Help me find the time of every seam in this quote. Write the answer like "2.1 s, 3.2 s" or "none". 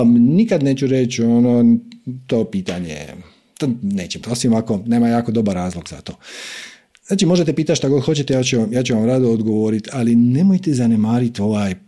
4.2 s